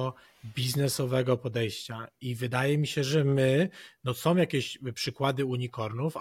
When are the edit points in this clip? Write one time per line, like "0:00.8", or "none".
none